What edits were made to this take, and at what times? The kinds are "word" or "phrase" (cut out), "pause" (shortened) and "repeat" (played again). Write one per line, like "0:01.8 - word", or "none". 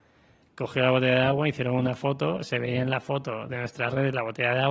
none